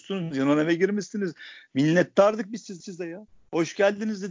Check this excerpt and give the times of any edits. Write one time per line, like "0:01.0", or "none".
0:02.8